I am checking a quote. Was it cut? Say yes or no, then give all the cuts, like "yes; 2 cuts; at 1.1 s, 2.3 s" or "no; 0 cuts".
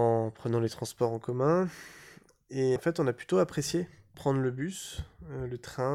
yes; 1 cut; at 2.8 s